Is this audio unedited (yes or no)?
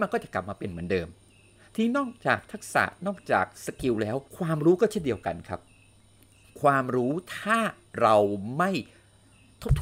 no